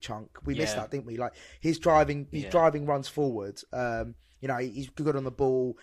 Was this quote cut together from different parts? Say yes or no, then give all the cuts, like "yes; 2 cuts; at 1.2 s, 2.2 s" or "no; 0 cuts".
no; 0 cuts